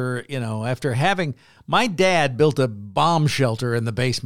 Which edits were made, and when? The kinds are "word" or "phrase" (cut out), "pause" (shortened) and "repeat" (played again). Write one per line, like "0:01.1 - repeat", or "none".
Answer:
none